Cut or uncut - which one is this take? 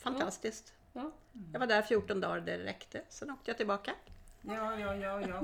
uncut